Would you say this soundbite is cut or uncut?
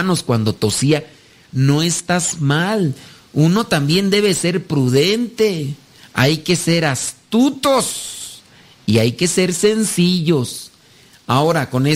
uncut